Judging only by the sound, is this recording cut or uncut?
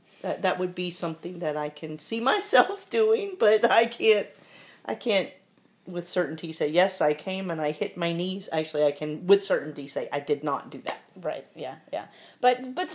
uncut